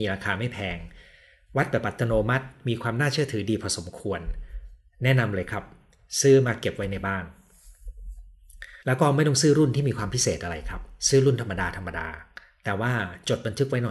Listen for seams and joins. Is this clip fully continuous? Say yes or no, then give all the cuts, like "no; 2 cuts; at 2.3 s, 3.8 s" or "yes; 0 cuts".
no; 1 cut; at 8.8 s